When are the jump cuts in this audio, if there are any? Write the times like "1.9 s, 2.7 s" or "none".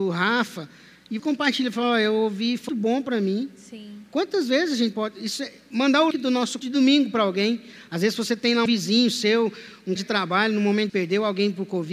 1.2 s, 2.7 s, 4.9 s, 6.1 s, 6.6 s, 8.7 s, 10.0 s, 10.9 s